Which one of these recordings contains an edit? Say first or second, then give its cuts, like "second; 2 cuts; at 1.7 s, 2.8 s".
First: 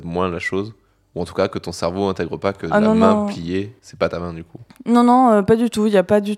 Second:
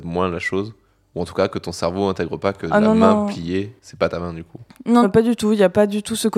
second; 1 cut; at 5.0 s